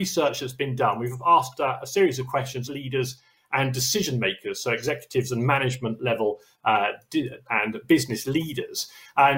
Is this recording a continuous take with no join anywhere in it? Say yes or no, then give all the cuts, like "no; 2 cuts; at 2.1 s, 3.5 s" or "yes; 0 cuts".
no; 2 cuts; at 2.7 s, 7.5 s